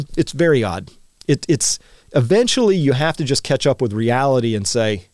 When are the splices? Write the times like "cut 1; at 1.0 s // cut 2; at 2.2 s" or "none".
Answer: none